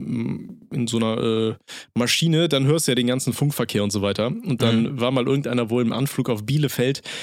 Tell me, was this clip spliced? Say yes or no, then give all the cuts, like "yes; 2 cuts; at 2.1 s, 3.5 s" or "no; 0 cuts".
no; 0 cuts